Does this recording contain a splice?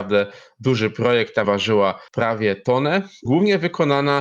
yes; 3 cuts; at 1.4 s, 2.1 s, 3.3 s

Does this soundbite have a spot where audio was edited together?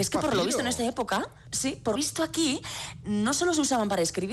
yes; 2 cuts; at 1.5 s, 2.0 s

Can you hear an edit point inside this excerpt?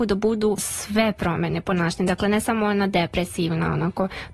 no; 0 cuts

